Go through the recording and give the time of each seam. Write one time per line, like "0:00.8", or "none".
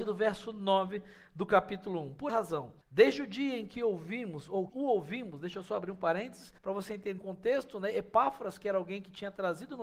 0:02.3
0:02.8
0:04.7
0:06.6
0:07.2